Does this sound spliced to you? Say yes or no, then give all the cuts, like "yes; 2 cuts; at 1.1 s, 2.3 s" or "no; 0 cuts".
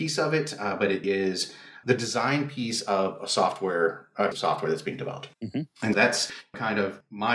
yes; 5 cuts; at 1.0 s, 1.8 s, 4.3 s, 5.3 s, 5.9 s